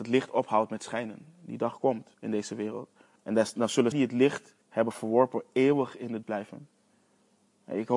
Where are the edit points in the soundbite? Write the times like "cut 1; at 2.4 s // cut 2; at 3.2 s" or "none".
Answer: cut 1; at 2.1 s // cut 2; at 3.2 s // cut 3; at 3.9 s // cut 4; at 4.6 s // cut 5; at 6.2 s